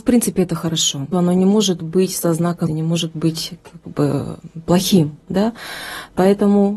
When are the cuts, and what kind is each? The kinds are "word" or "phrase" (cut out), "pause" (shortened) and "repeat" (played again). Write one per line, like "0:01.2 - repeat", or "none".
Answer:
0:01.1 - phrase
0:02.7 - word